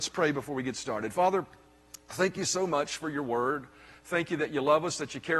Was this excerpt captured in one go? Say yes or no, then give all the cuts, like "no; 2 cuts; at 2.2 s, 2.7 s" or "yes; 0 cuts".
yes; 0 cuts